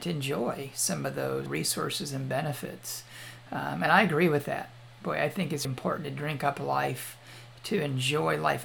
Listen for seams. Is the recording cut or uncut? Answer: cut